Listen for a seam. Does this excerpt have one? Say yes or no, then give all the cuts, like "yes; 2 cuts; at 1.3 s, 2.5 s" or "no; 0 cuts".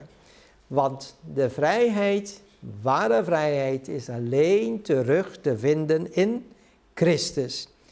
no; 0 cuts